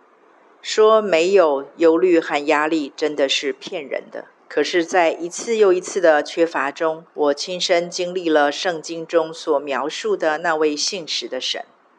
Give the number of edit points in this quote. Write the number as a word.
two